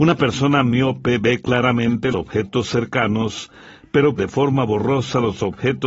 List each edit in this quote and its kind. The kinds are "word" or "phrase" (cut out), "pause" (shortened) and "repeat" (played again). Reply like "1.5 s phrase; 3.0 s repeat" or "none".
2.1 s word; 4.2 s word